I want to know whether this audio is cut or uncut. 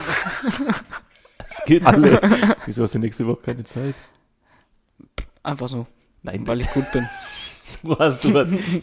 cut